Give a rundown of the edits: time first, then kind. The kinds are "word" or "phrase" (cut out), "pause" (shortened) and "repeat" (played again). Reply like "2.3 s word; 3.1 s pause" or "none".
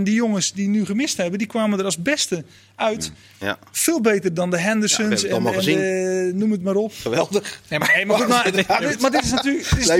none